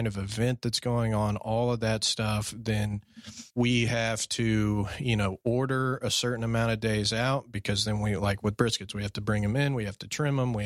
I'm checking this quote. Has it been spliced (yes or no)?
yes